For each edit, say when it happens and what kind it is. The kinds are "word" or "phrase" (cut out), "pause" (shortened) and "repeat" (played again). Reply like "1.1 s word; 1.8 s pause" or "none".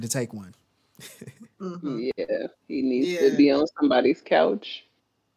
2.6 s pause